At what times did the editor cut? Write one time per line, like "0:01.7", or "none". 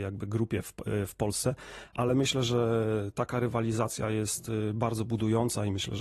none